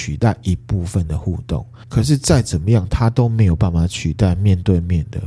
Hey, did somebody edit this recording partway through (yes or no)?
yes